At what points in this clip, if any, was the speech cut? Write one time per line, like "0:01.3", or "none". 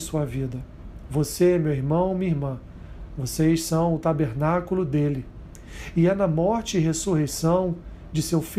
none